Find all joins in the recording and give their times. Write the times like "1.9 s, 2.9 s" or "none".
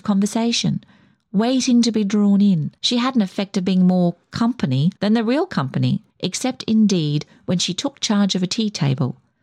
2.8 s, 5.0 s, 6.1 s